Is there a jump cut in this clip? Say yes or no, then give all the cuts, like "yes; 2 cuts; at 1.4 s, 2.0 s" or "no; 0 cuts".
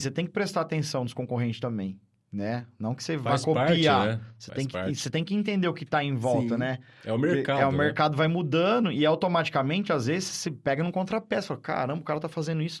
no; 0 cuts